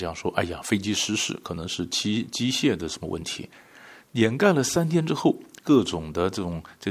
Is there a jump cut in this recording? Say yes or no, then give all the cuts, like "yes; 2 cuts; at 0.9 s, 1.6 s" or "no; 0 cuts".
no; 0 cuts